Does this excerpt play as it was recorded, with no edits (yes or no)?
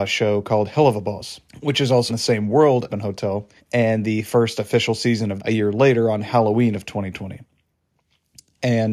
no